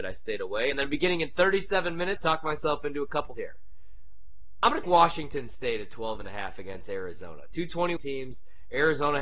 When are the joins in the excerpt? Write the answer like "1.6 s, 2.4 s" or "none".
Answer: 2.2 s, 3.4 s, 4.8 s, 8.0 s